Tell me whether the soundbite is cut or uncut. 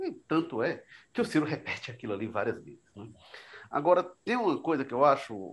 uncut